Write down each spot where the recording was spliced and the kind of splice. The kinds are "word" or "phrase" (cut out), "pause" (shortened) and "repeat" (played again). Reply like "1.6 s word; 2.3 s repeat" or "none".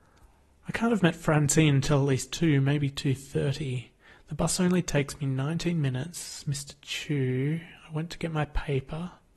none